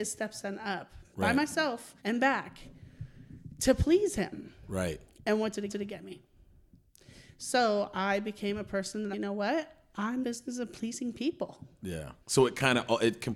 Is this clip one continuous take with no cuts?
no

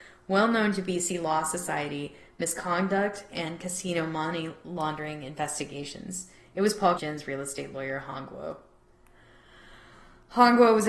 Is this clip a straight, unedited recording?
no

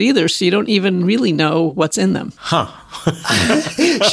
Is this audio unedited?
no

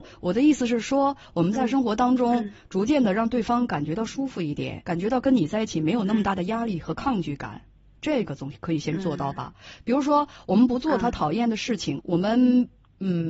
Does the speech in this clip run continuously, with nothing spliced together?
no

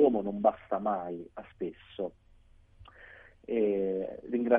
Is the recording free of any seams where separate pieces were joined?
no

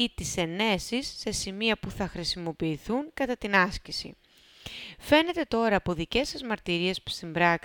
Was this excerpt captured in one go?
yes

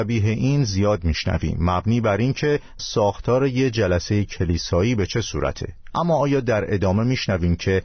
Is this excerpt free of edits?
no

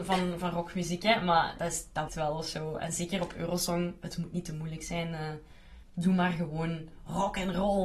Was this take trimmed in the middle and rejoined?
yes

